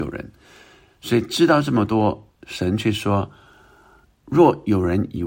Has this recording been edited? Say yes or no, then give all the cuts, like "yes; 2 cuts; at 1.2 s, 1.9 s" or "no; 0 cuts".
yes; 1 cut; at 2.3 s